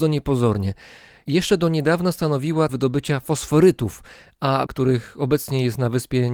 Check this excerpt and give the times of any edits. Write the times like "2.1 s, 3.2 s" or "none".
2.7 s, 4.7 s